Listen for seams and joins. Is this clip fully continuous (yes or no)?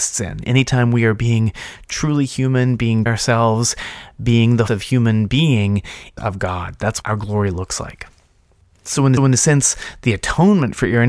no